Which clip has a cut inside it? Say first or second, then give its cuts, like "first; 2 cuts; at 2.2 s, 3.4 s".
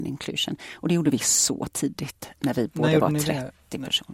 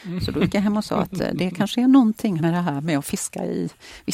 second; 1 cut; at 2.4 s